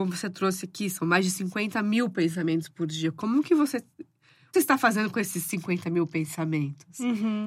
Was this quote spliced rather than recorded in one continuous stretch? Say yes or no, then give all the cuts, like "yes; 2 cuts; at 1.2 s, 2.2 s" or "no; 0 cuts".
yes; 1 cut; at 4.5 s